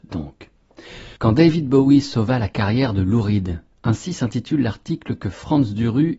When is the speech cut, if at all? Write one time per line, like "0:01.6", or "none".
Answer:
0:01.2